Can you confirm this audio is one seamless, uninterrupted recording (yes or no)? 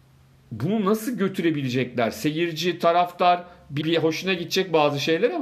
no